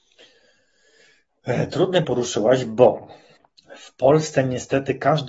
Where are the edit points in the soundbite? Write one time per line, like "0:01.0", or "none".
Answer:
0:02.0
0:03.4